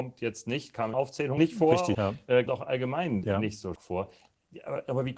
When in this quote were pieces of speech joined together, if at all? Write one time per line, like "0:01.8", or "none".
0:00.9
0:01.4
0:01.9
0:02.5
0:03.2
0:03.8